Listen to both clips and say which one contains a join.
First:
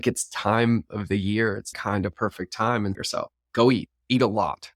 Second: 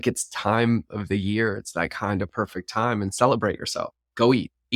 first; 2 cuts; at 1.7 s, 2.9 s

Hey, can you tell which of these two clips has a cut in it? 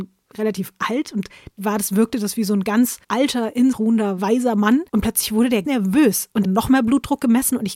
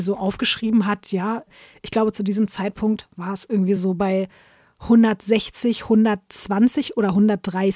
first; 6 cuts; at 1.6 s, 3.0 s, 3.7 s, 4.9 s, 5.6 s, 6.4 s

